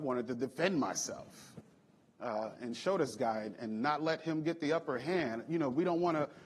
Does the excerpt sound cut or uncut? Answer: uncut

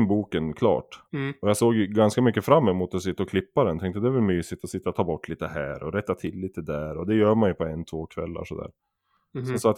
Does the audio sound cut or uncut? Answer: cut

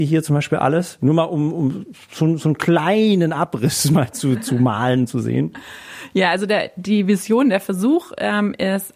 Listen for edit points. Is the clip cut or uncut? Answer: uncut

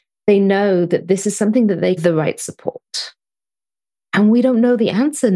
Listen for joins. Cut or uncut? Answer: cut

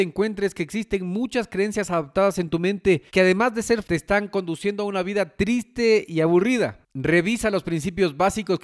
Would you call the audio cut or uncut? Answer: cut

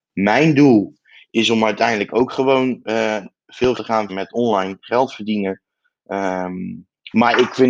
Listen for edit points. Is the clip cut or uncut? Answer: cut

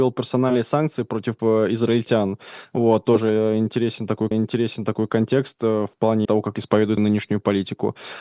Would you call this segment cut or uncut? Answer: cut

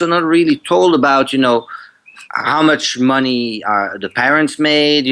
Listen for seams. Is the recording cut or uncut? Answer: cut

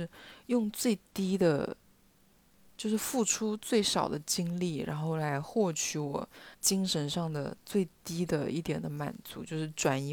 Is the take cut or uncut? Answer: cut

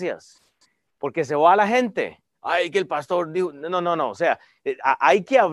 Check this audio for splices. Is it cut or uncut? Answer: uncut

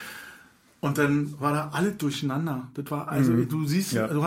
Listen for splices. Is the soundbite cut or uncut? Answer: uncut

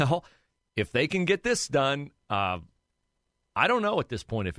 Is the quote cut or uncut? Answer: uncut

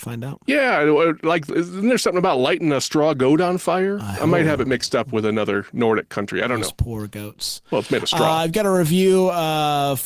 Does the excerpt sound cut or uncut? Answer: uncut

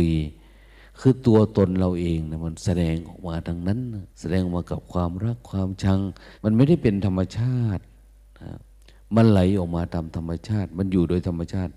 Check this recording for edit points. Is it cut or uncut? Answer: cut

